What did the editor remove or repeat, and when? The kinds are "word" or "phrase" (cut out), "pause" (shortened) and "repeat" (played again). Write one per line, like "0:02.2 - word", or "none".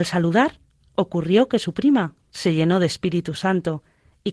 none